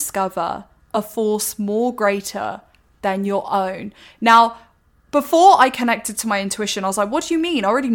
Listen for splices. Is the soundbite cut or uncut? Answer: uncut